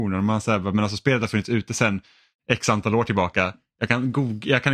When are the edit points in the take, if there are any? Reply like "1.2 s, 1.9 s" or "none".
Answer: none